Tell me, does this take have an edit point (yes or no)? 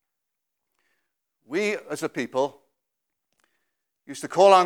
no